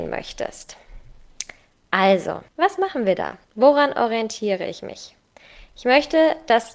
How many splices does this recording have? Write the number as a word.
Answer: two